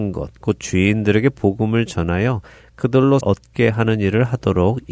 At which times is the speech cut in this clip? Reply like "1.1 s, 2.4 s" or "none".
3.2 s